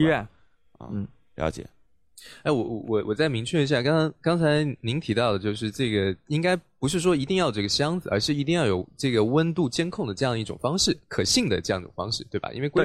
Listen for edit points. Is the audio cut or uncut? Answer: uncut